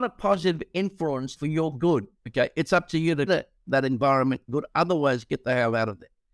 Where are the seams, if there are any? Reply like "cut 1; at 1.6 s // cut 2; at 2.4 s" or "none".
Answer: cut 1; at 1.4 s // cut 2; at 2.2 s // cut 3; at 3.3 s // cut 4; at 4.5 s